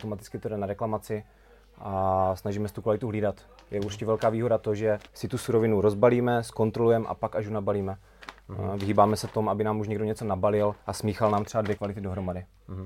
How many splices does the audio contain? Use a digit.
3